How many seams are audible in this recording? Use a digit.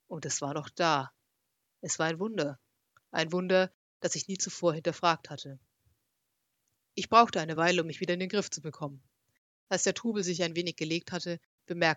0